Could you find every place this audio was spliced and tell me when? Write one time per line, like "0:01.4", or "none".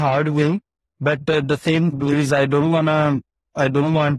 0:01.9